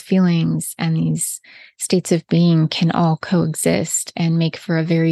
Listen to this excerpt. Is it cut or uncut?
uncut